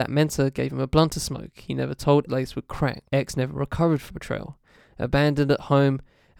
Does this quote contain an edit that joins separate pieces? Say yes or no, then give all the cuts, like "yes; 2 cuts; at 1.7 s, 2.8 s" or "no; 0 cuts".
yes; 3 cuts; at 2.3 s, 3.1 s, 4.1 s